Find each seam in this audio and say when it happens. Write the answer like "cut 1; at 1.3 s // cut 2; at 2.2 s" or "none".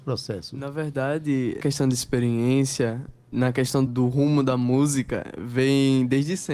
cut 1; at 1.6 s // cut 2; at 3.9 s

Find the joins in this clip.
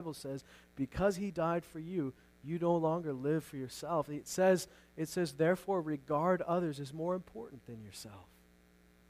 none

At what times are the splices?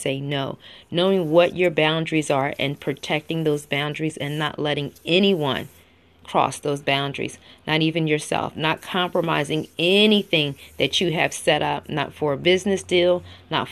none

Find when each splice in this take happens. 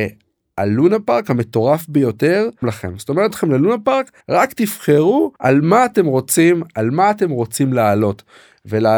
cut 1; at 2.6 s // cut 2; at 3.3 s // cut 3; at 4.2 s // cut 4; at 5.4 s

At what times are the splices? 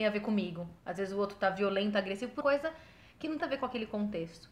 cut 1; at 2.4 s // cut 2; at 3.4 s

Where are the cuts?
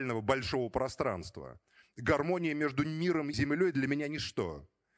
cut 1; at 3.3 s

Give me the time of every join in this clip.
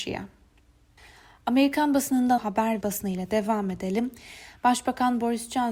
cut 1; at 2.4 s // cut 2; at 2.8 s

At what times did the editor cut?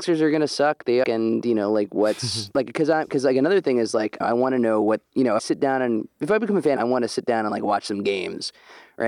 cut 1; at 1.0 s // cut 2; at 4.2 s // cut 3; at 5.4 s // cut 4; at 6.8 s

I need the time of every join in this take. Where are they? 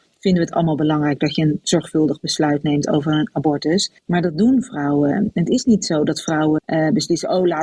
cut 1; at 4.0 s // cut 2; at 6.6 s

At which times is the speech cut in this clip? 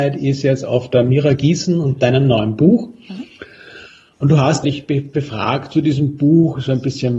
cut 1; at 4.6 s

